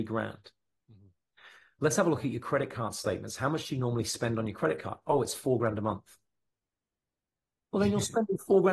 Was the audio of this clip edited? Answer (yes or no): no